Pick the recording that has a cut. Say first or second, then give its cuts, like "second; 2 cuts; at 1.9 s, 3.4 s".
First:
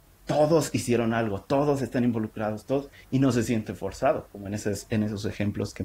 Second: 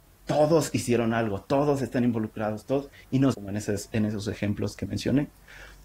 second; 1 cut; at 3.3 s